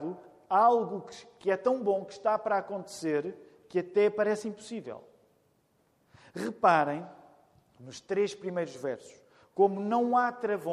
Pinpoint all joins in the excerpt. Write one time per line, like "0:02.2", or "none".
none